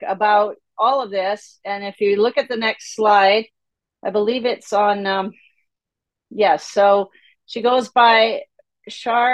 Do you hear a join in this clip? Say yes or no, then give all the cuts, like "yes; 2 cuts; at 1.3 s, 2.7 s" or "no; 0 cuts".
no; 0 cuts